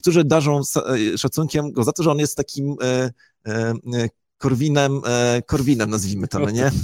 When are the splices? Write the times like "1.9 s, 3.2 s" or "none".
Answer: none